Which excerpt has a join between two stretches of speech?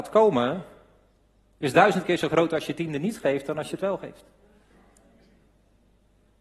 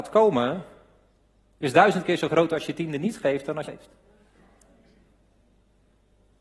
second; 1 cut; at 3.6 s

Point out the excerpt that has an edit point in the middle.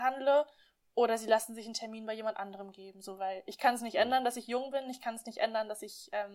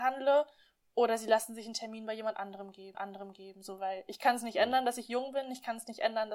second; 1 cut; at 2.9 s

